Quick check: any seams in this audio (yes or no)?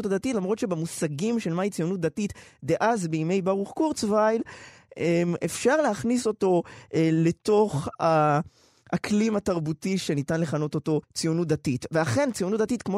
yes